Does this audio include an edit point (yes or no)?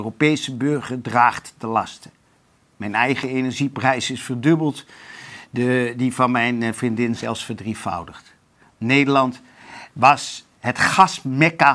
no